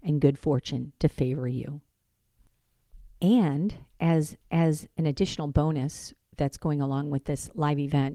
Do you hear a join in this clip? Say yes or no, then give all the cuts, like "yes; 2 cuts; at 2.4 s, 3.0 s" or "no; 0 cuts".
yes; 1 cut; at 4.4 s